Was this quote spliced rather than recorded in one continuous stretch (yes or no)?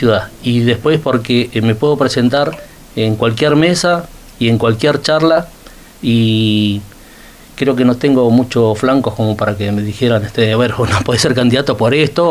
no